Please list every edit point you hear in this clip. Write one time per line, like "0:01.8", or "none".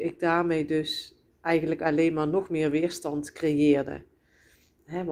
none